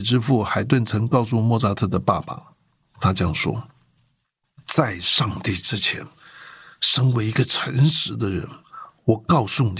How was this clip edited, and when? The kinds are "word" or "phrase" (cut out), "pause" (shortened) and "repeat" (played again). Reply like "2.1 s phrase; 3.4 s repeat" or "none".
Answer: none